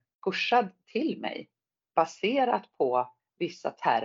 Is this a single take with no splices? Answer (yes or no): yes